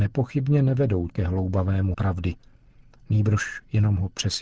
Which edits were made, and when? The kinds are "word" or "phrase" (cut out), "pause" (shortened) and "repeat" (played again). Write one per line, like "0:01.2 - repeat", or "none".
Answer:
0:01.1 - word
0:01.9 - word